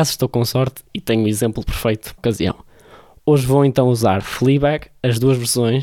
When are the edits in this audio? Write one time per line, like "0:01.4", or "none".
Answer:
0:02.2